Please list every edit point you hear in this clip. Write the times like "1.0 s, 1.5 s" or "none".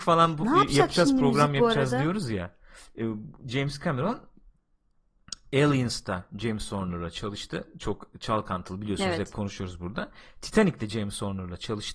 none